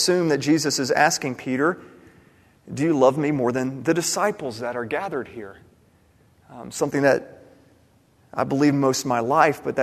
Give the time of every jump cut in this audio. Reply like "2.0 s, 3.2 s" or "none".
none